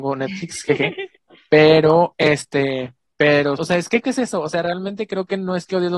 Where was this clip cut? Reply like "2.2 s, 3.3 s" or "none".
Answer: 3.6 s, 4.0 s